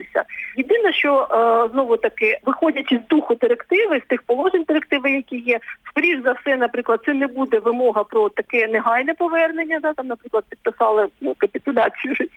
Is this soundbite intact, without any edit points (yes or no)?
yes